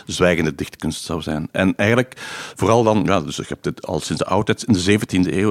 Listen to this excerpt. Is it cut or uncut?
uncut